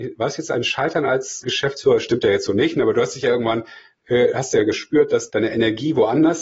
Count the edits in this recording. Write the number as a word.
one